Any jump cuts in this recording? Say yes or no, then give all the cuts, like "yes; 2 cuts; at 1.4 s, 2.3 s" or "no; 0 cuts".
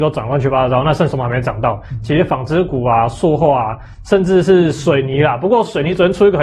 no; 0 cuts